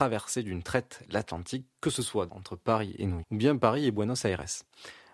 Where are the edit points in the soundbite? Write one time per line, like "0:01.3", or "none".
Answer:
0:02.3
0:03.2